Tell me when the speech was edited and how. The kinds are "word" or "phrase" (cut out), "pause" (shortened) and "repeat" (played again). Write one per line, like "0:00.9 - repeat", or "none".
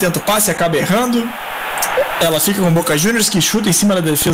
none